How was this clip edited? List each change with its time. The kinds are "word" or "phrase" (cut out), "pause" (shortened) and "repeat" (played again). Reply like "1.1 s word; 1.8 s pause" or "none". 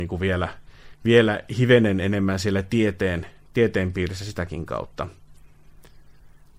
none

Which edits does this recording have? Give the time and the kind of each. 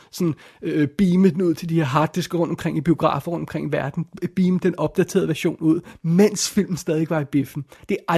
none

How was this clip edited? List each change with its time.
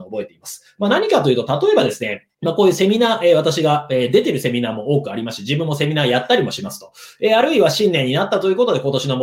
2.3 s pause

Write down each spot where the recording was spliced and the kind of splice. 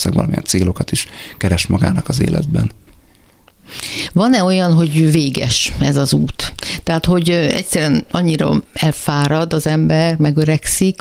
none

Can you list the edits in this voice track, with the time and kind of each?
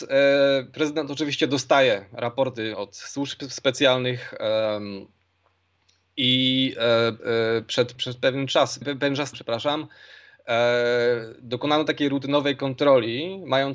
7.2 s word; 8.0 s word; 8.8 s word; 9.3 s word

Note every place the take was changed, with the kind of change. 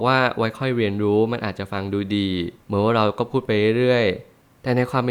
2.6 s pause

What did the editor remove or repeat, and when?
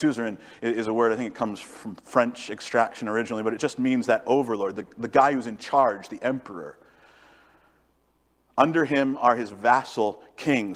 none

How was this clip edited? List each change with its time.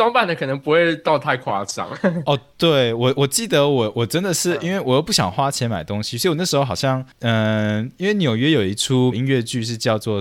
7.1 s pause; 9.1 s word

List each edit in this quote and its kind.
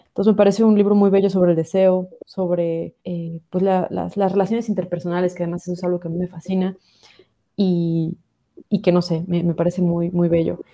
3.0 s pause; 8.7 s pause

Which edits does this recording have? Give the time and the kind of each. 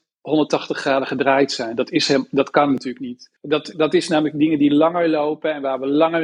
3.4 s pause

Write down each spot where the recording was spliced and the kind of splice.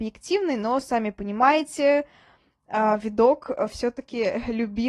none

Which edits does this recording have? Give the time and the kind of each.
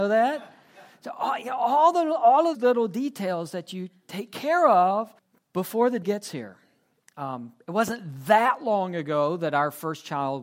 2.5 s word; 5.2 s pause; 6.0 s word

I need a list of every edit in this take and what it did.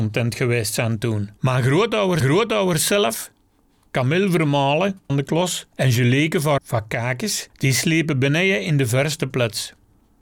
1.4 s pause; 2.2 s repeat; 5.1 s phrase; 5.7 s pause; 6.6 s word; 7.5 s pause

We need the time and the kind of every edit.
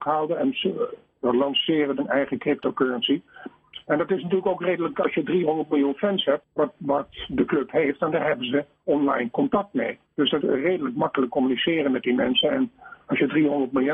2.0 s word; 4.9 s word; 6.4 s word; 10.1 s pause; 10.4 s word

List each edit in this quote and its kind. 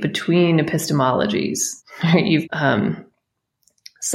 1.8 s pause; 2.4 s word

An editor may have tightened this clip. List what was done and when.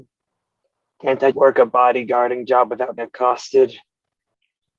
1.3 s word; 3.0 s word

